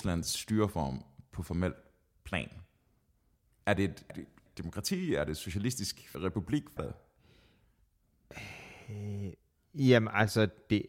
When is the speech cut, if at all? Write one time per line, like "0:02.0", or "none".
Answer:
0:04.1
0:04.5
0:06.1
0:06.8